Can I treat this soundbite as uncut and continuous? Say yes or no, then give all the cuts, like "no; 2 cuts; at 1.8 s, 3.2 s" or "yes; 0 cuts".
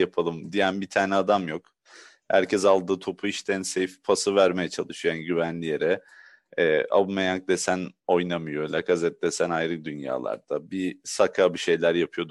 yes; 0 cuts